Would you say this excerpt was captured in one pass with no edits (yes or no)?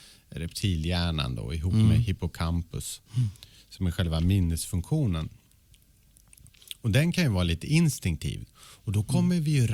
no